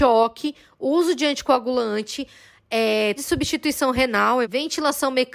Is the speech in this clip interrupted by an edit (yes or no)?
yes